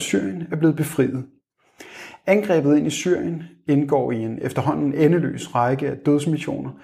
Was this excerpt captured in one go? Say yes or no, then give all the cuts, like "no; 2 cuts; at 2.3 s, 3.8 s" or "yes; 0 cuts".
yes; 0 cuts